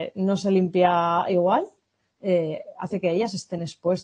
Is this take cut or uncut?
uncut